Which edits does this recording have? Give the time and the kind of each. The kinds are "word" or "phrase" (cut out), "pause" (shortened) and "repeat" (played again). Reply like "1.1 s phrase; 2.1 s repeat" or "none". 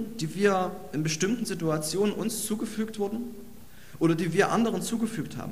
none